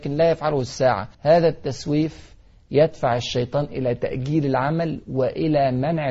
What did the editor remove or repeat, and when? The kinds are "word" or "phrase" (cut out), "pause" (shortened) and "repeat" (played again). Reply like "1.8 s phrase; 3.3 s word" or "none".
1.1 s pause